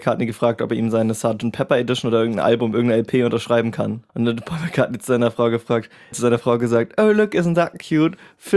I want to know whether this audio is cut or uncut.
cut